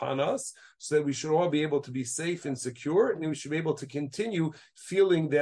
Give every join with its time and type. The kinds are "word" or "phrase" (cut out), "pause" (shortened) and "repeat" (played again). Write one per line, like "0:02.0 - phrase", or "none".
none

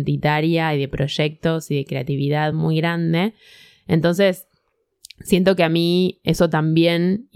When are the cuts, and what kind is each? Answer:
none

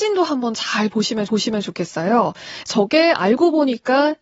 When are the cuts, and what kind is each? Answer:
0:01.3 - repeat

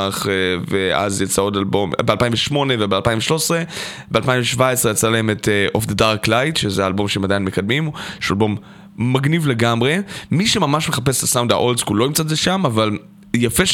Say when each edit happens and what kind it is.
none

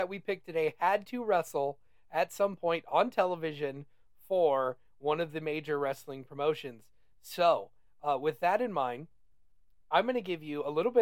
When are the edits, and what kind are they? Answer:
none

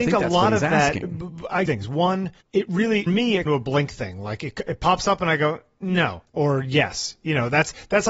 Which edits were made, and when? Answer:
0:01.7 - phrase
0:02.4 - pause
0:03.1 - word
0:03.5 - phrase
0:06.3 - pause

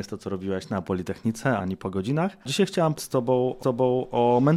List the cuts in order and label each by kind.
0:01.6 - word
0:02.4 - pause
0:03.0 - word
0:03.6 - repeat

